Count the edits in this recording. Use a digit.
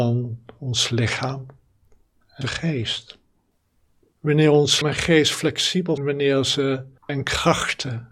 4